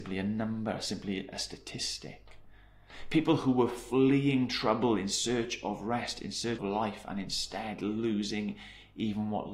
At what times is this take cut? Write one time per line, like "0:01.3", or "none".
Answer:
0:06.6